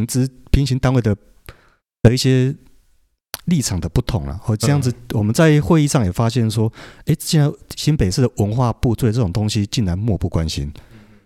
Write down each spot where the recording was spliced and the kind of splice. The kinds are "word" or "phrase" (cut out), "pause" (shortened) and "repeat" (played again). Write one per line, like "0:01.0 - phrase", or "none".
none